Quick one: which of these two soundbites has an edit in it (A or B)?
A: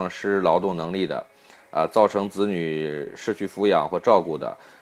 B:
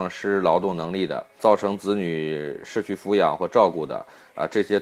B